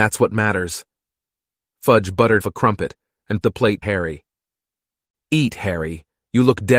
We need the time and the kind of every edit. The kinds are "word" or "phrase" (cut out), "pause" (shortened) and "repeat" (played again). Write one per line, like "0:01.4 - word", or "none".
0:02.4 - word
0:03.4 - word
0:03.8 - word